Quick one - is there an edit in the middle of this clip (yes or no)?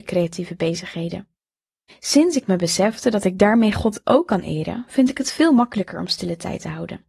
no